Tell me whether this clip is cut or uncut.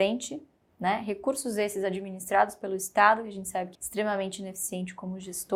cut